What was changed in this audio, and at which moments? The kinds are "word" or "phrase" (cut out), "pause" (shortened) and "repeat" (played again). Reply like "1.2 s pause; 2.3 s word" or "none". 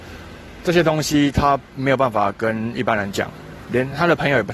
1.7 s pause